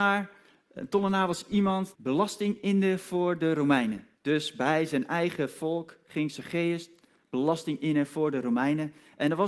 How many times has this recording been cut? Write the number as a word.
two